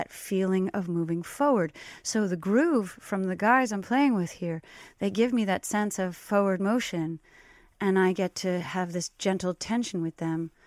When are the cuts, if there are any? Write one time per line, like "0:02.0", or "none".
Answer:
none

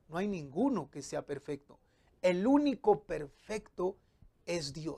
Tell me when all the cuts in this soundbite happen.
none

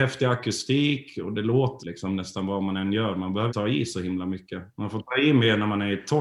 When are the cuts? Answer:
0:01.8
0:03.5
0:04.7

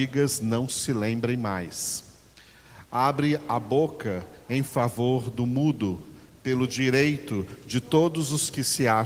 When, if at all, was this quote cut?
none

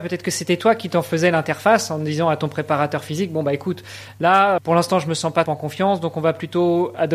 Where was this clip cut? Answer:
0:04.6
0:05.5

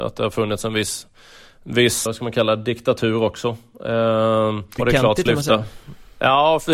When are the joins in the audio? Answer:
0:02.1
0:04.8
0:05.3

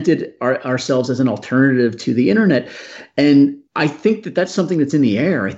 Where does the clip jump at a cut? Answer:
0:03.7

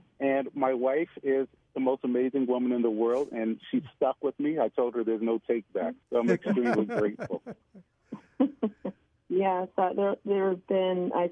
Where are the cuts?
0:06.0
0:09.2

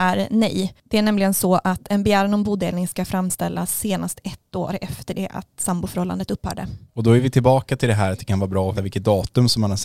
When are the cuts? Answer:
0:06.9
0:08.7

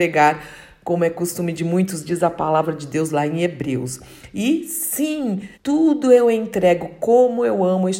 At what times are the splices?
0:05.5

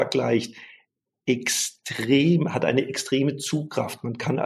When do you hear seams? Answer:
none

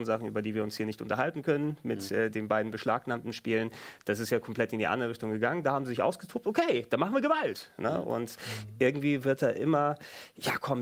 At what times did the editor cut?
none

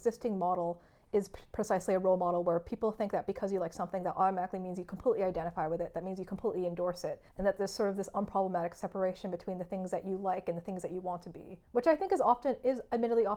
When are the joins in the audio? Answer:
0:07.3
0:11.6

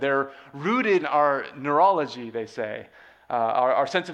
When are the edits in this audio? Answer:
0:01.0

